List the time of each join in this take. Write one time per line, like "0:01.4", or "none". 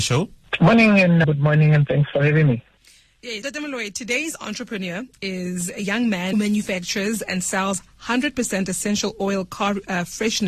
0:01.2
0:03.4
0:06.3

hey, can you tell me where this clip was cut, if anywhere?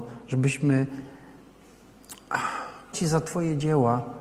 0:02.9

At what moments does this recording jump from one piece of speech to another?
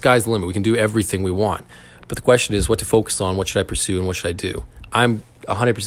none

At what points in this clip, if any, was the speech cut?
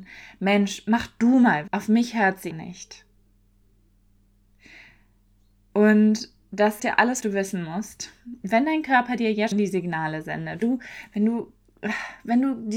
0:01.7
0:02.5
0:06.8
0:07.2
0:09.5
0:10.6

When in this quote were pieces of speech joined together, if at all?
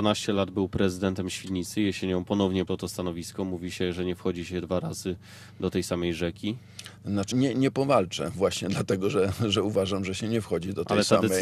0:02.7
0:07.3

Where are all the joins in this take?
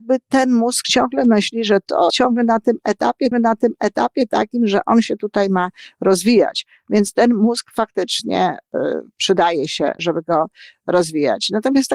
0:02.1
0:03.3
0:10.0

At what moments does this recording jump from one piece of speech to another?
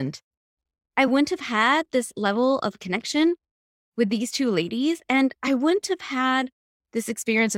none

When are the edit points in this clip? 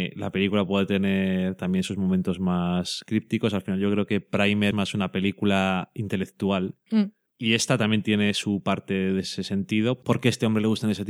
0:04.7

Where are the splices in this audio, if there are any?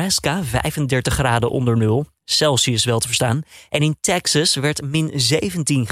none

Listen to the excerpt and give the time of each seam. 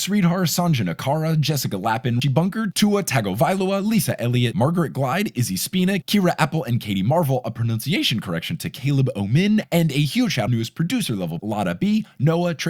0:02.2
0:10.5
0:11.4

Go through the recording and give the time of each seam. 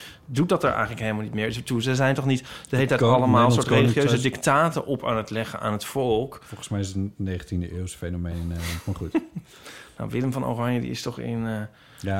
none

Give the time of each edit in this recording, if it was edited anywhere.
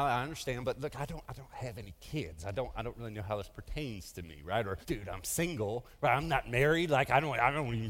0:04.8

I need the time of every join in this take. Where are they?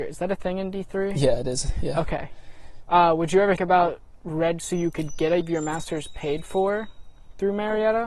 0:03.6
0:04.6
0:05.4

